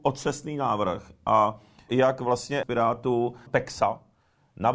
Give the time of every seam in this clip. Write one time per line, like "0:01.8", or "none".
0:01.9
0:02.6
0:03.5